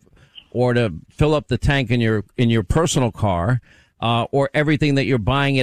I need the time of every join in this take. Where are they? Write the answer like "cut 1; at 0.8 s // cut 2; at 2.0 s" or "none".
none